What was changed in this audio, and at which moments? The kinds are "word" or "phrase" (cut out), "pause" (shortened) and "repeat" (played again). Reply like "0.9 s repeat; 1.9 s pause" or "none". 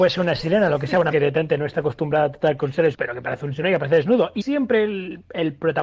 1.1 s word; 2.9 s word; 3.6 s word; 4.4 s word